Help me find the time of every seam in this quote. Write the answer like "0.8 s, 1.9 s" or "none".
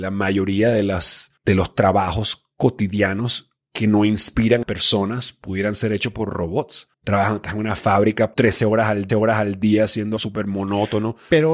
1.4 s, 4.6 s, 6.9 s, 8.3 s, 9.1 s, 10.2 s

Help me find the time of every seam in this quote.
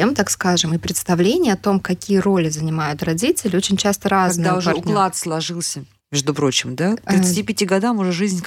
none

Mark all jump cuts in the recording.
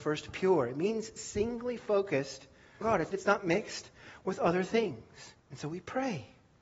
2.8 s, 3.1 s, 5.4 s

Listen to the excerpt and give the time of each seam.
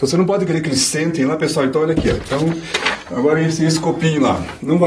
none

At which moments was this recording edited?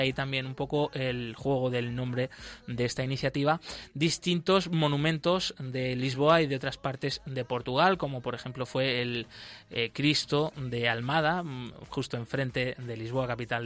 none

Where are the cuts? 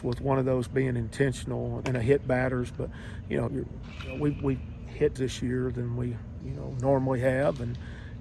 1.8 s, 3.5 s, 5.2 s, 6.4 s

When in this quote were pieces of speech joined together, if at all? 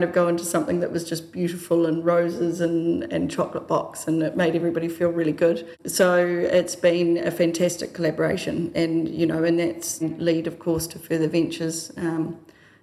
8.7 s, 10.0 s

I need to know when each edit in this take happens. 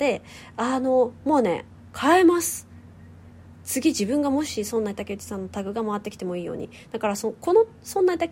none

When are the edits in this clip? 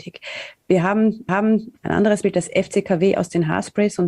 1.3 s, 2.2 s

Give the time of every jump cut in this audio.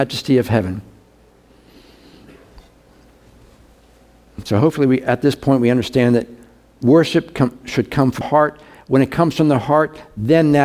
8.2 s

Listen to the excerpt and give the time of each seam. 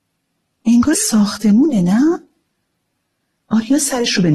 0.9 s

